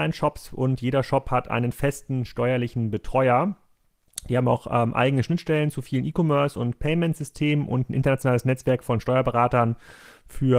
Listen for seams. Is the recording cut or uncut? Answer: uncut